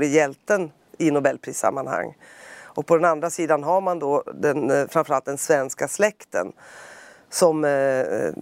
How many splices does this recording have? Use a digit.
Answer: 0